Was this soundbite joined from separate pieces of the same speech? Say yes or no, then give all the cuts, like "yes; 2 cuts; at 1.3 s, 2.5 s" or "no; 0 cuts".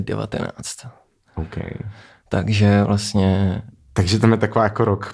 no; 0 cuts